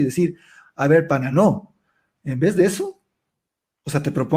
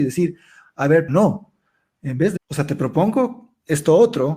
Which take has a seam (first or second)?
second